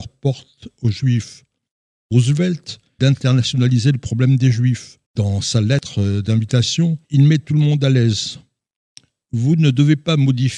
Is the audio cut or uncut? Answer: cut